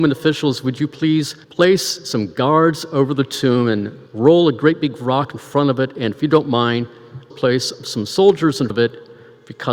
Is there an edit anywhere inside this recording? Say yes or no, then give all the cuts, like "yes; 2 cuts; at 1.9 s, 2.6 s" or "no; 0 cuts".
yes; 4 cuts; at 1.4 s, 4.1 s, 7.3 s, 8.7 s